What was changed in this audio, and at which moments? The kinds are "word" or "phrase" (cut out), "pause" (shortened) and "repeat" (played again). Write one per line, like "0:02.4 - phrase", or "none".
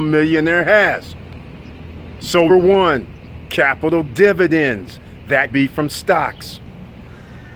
0:02.5 - word
0:04.1 - word
0:05.5 - word